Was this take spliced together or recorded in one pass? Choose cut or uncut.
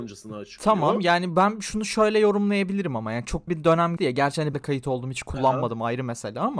cut